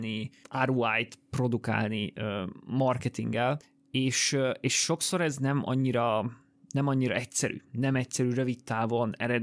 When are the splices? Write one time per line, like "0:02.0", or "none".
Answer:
none

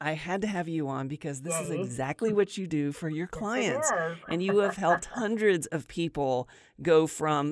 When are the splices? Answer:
none

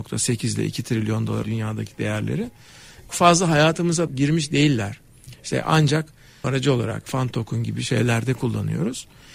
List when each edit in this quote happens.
0:01.4
0:03.1
0:04.1
0:06.4
0:07.1

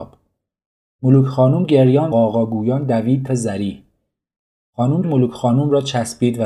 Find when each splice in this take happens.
0:02.1
0:03.3
0:05.0

